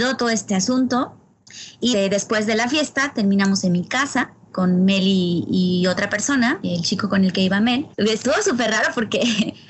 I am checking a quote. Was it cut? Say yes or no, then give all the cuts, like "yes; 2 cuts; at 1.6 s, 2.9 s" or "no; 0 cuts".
yes; 1 cut; at 7.9 s